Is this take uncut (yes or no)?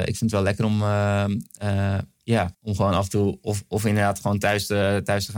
no